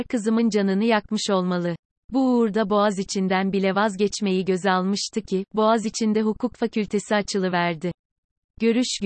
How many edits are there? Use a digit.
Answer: 0